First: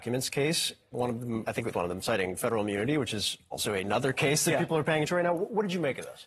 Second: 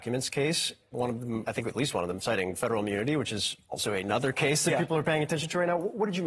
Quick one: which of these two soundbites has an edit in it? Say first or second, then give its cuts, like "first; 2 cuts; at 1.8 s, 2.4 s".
first; 2 cuts; at 1.7 s, 5.1 s